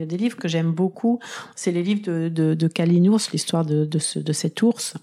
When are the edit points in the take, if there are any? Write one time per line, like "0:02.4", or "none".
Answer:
none